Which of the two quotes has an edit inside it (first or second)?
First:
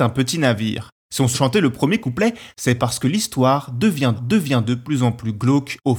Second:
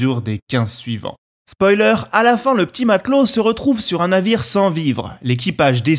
first